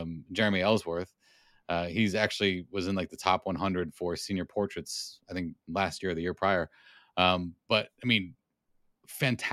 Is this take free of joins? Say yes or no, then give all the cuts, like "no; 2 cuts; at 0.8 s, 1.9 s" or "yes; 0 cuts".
yes; 0 cuts